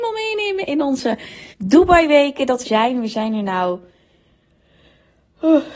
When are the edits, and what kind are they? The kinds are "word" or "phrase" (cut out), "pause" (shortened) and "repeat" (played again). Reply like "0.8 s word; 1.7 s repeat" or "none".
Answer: 1.5 s pause; 2.6 s phrase